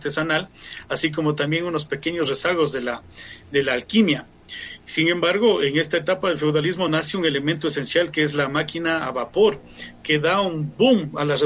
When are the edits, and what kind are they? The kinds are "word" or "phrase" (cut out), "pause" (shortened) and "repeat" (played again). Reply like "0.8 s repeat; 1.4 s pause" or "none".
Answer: none